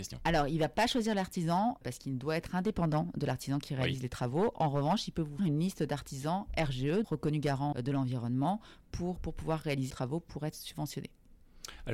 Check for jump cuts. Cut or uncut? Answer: cut